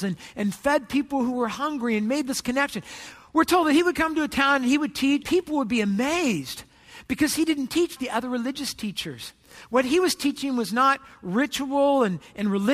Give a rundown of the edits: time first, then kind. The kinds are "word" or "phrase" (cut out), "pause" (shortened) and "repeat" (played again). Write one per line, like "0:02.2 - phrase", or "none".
0:05.2 - word
0:08.0 - word